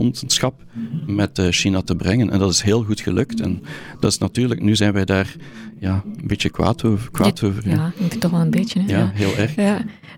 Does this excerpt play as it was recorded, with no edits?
yes; 0 cuts

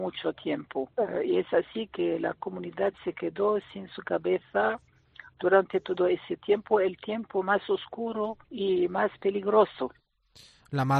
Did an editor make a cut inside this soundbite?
yes; 1 cut; at 8.4 s

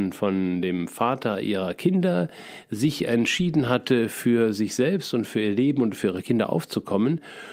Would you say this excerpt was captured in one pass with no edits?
yes; 0 cuts

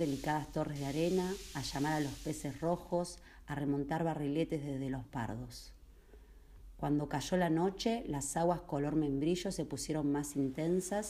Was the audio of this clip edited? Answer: yes; 1 cut; at 5.0 s

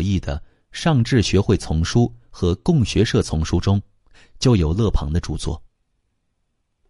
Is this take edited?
no; 0 cuts

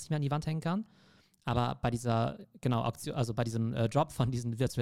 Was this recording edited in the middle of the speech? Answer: no; 0 cuts

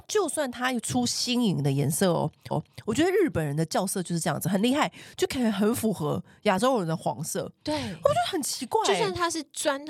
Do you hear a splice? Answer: yes; 1 cut; at 2.5 s

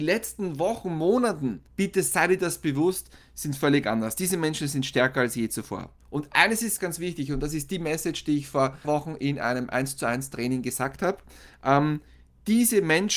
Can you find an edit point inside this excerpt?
yes; 4 cuts; at 1.7 s, 6.0 s, 6.8 s, 8.8 s

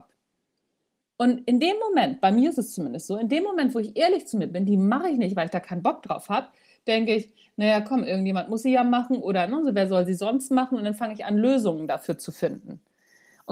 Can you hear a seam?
no; 0 cuts

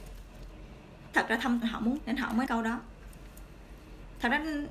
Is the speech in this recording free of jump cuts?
no; 4 cuts; at 1.1 s, 1.6 s, 2.0 s, 2.5 s

